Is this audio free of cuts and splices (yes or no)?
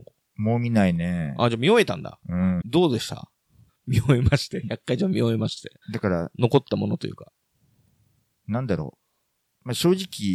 no